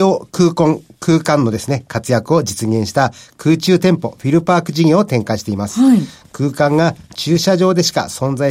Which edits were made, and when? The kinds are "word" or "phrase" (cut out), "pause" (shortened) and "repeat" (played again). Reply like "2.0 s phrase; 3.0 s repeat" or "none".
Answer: none